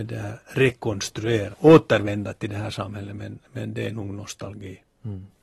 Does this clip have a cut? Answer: yes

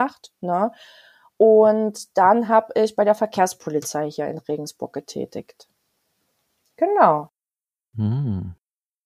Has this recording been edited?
no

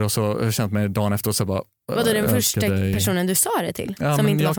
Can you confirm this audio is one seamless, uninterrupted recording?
yes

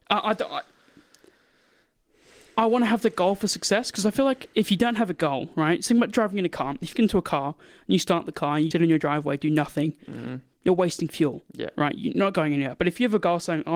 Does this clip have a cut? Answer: yes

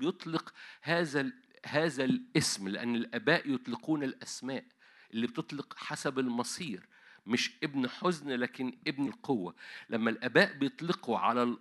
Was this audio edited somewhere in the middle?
yes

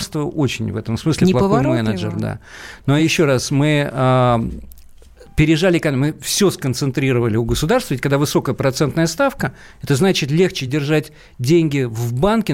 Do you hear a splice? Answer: no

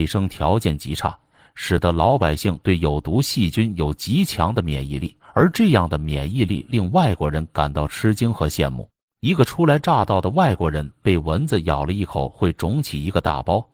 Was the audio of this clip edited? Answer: yes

